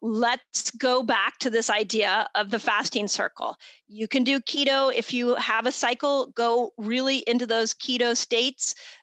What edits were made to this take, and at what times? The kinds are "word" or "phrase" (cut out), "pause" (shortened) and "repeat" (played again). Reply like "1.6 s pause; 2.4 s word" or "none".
none